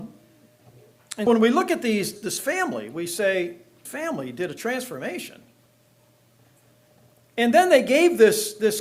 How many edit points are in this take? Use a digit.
4